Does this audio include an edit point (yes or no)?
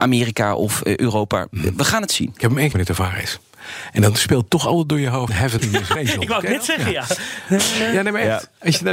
yes